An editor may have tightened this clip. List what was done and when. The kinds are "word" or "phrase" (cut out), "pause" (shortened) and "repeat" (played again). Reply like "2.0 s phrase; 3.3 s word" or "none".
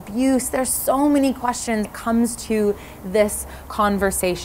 1.8 s word

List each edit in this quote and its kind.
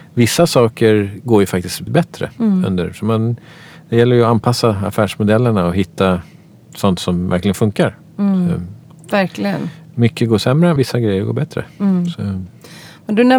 1.9 s word; 10.8 s word

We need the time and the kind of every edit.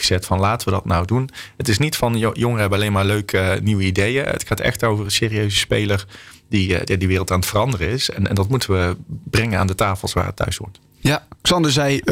none

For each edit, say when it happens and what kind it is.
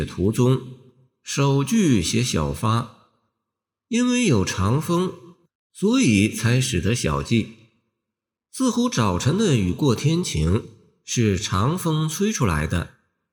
none

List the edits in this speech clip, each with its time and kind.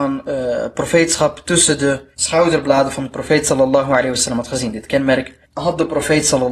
2.1 s pause; 5.4 s pause

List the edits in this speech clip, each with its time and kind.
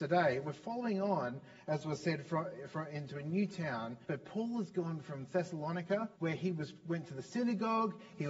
4.0 s pause; 6.1 s pause

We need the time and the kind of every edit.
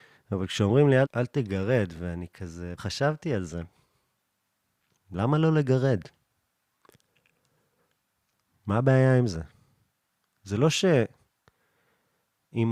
1.0 s word; 2.8 s word

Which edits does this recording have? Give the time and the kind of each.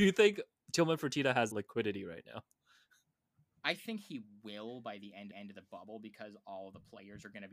1.5 s word; 5.3 s repeat

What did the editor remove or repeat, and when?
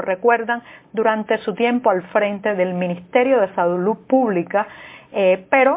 none

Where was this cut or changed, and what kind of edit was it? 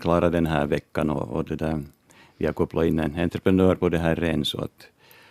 none

